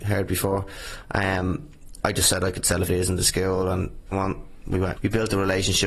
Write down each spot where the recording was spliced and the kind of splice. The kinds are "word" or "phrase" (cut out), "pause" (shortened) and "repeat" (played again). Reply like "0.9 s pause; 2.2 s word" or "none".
2.0 s word; 2.9 s word; 4.1 s word; 5.0 s word